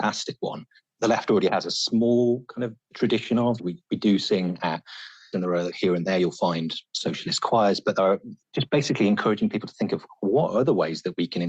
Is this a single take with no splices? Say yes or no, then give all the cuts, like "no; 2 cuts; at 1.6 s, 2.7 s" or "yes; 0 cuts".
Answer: no; 2 cuts; at 5.3 s, 8.4 s